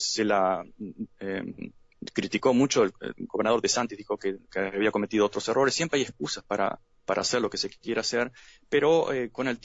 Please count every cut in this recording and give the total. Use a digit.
0